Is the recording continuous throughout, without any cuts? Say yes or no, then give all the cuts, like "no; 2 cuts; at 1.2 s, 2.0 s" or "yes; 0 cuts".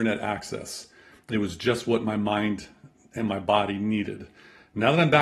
yes; 0 cuts